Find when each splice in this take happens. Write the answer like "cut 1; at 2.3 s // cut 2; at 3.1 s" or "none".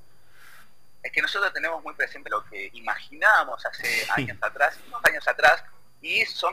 cut 1; at 2.2 s // cut 2; at 5.0 s